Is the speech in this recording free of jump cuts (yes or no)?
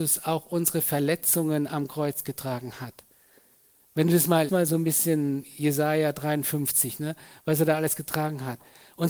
no